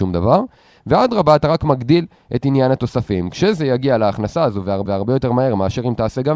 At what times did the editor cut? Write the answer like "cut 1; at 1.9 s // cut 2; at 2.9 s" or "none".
cut 1; at 4.9 s